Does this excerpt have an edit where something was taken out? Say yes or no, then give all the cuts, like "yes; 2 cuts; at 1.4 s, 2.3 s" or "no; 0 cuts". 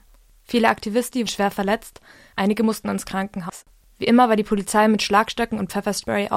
yes; 1 cut; at 1.3 s